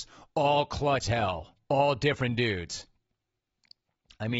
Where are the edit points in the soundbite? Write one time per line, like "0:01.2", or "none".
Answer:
0:01.0
0:01.6